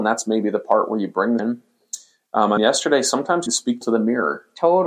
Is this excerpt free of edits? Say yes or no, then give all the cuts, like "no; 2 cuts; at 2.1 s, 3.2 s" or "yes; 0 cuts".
no; 4 cuts; at 1.4 s, 2.6 s, 3.5 s, 3.8 s